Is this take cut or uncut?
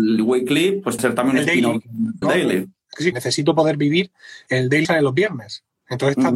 cut